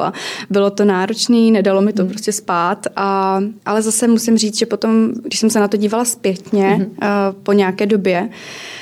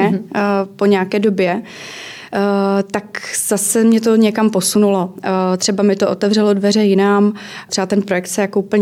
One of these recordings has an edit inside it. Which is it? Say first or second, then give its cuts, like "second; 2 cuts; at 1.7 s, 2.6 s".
first; 1 cut; at 3.6 s